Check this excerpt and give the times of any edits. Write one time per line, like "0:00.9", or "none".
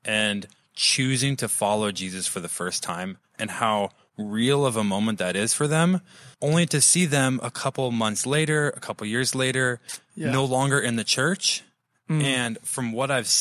0:06.3